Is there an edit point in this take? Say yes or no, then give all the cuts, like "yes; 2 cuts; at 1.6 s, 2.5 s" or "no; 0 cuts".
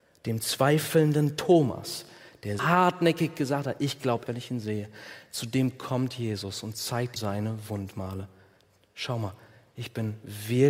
yes; 3 cuts; at 2.6 s, 4.3 s, 7.2 s